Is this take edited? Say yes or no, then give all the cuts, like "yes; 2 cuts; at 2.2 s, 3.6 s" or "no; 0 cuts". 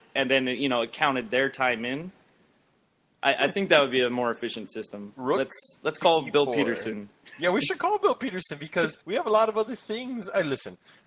yes; 1 cut; at 9.0 s